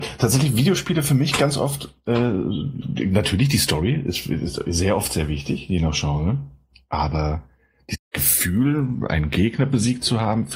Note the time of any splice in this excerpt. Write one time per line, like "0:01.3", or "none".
0:02.8